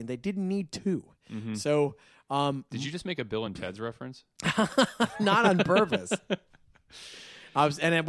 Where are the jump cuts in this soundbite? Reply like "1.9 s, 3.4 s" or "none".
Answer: none